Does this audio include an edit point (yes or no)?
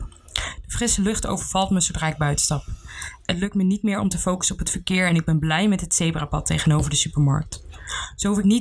no